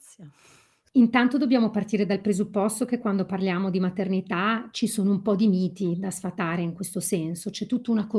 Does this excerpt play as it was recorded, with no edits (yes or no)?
yes